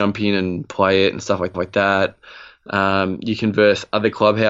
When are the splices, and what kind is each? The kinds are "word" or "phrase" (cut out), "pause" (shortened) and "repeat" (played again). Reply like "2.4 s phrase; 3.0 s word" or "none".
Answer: 1.5 s repeat